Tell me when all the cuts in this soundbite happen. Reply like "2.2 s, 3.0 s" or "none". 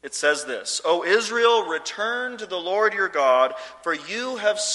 none